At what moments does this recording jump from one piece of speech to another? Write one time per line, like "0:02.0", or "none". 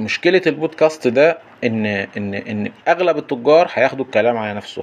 0:02.8